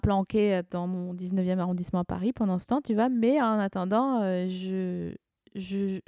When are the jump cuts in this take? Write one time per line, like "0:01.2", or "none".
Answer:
none